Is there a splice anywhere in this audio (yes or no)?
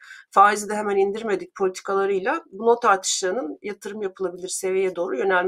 no